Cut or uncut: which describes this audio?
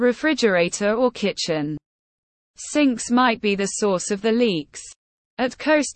uncut